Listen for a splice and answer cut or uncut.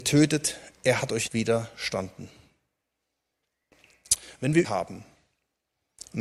cut